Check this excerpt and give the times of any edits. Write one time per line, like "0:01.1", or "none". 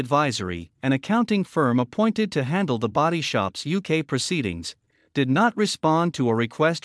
none